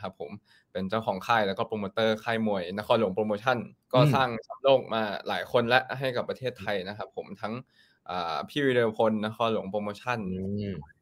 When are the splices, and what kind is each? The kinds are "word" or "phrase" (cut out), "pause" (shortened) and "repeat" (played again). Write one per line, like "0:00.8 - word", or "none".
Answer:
0:03.8 - pause

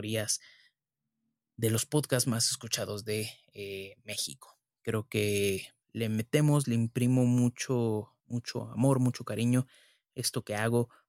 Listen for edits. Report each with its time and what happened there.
0:05.8 - pause
0:08.2 - pause

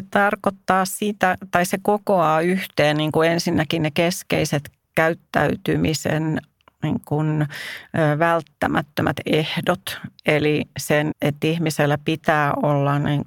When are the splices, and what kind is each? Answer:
0:11.1 - word

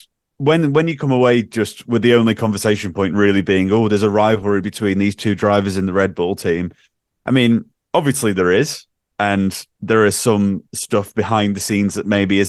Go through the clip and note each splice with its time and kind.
0:10.7 - pause

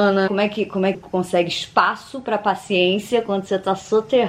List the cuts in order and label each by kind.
0:00.9 - word

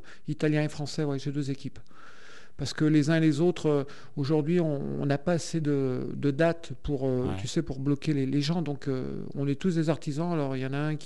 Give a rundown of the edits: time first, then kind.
none

